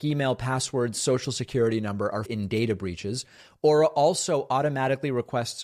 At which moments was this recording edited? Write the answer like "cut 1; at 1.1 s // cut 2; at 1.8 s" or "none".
cut 1; at 2.2 s